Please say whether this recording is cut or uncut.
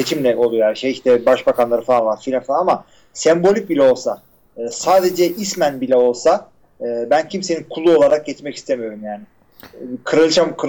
uncut